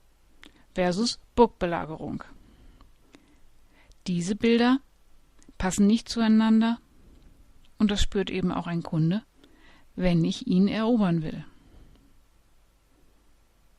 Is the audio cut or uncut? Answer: uncut